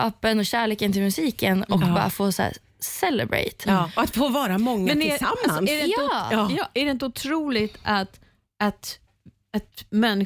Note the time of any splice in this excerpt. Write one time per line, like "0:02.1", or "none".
none